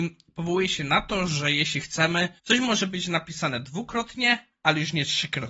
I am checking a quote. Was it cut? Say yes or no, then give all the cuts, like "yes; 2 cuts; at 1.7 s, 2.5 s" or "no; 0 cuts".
yes; 1 cut; at 2.4 s